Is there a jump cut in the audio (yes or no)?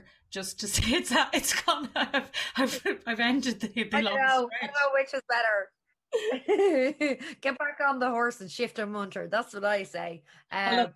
no